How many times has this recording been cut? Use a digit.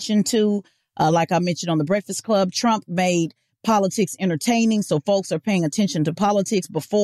0